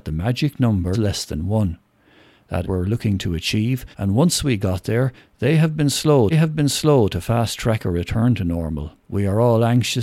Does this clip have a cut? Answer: yes; 5 cuts; at 0.9 s, 2.6 s, 3.9 s, 6.3 s, 9.0 s

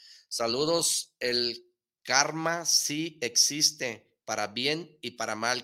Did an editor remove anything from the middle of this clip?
no; 0 cuts

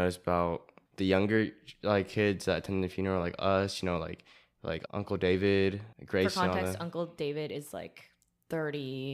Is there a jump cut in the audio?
no; 0 cuts

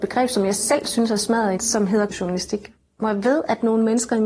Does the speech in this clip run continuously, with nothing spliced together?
no; 2 cuts; at 1.6 s, 2.1 s

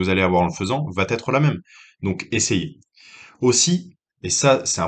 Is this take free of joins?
yes; 0 cuts

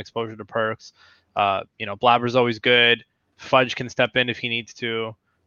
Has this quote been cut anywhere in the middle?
no; 0 cuts

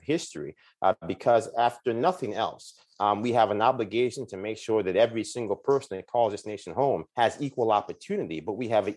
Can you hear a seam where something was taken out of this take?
yes; 1 cut; at 7.1 s

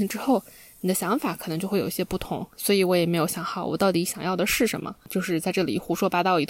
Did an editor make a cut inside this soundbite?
yes; 1 cut; at 2.5 s

